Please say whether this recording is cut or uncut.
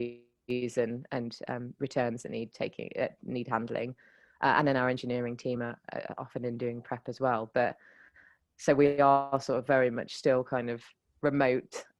uncut